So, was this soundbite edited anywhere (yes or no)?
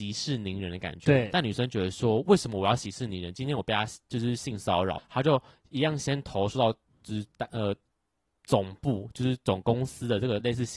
yes